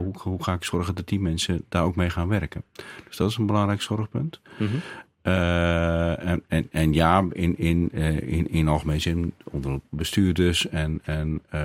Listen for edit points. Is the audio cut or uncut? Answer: uncut